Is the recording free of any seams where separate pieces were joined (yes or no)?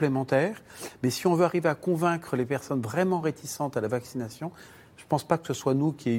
yes